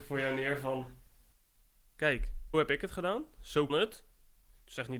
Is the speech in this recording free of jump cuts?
no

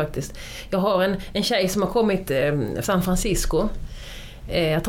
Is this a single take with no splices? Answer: no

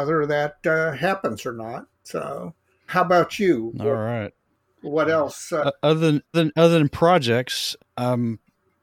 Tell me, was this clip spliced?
yes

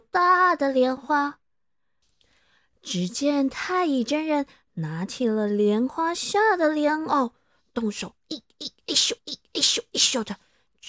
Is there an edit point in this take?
yes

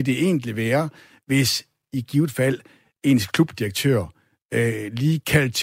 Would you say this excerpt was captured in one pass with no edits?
yes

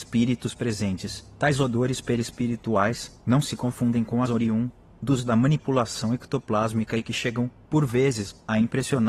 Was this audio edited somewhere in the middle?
yes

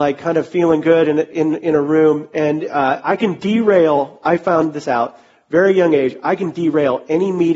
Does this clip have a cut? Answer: no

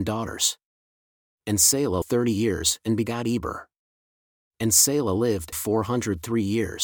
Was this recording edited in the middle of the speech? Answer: yes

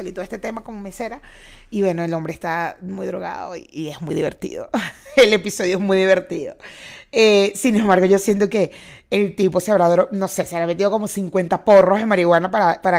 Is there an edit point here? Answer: no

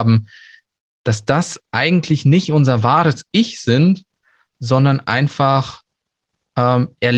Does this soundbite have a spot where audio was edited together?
no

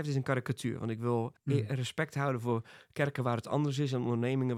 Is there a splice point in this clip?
yes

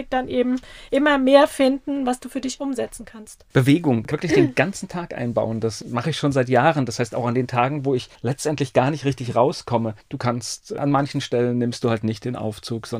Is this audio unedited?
no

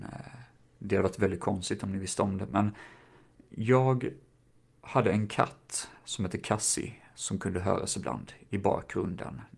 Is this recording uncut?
no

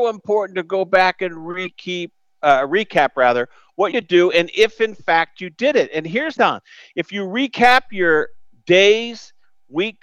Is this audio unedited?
no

